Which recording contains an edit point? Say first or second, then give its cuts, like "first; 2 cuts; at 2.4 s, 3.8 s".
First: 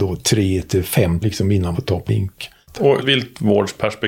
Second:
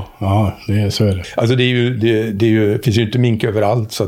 first; 4 cuts; at 1.2 s, 1.7 s, 2.1 s, 3.0 s